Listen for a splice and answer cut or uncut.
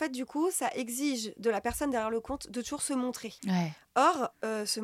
cut